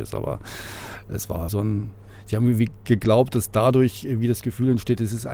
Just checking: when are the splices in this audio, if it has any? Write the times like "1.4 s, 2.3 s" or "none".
1.5 s